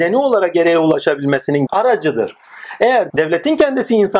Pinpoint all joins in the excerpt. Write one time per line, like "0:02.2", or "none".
0:01.7
0:03.1